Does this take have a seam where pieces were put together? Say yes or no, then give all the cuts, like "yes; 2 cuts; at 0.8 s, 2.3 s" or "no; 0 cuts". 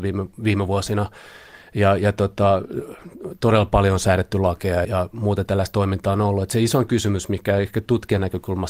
yes; 1 cut; at 4.8 s